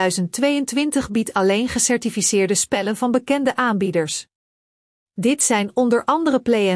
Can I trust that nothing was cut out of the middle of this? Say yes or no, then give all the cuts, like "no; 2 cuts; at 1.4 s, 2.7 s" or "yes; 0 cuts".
yes; 0 cuts